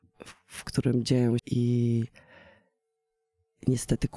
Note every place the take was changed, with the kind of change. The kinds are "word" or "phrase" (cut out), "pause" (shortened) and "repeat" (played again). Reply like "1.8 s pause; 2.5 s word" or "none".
1.4 s word